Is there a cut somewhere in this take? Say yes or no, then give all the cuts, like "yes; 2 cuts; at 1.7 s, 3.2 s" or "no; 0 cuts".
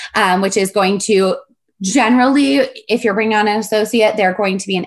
no; 0 cuts